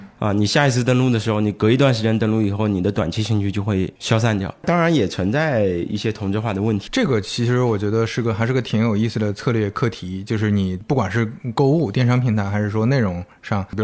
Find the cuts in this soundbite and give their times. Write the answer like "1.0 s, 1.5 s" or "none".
4.0 s